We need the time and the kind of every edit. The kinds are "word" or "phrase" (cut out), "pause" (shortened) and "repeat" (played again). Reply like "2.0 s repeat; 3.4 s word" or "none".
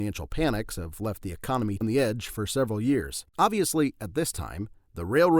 1.8 s phrase; 3.3 s pause